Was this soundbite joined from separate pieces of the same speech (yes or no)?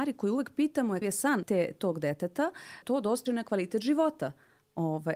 yes